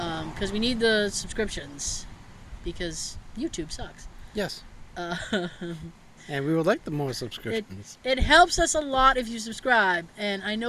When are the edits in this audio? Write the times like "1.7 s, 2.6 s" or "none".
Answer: 2.6 s